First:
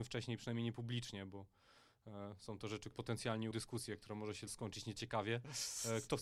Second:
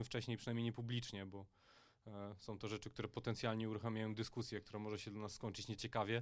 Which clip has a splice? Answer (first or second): first